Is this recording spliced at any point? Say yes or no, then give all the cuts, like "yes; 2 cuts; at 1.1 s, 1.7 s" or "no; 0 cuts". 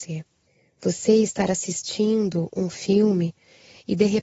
no; 0 cuts